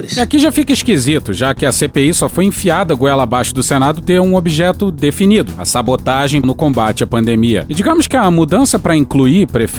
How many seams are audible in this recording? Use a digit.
2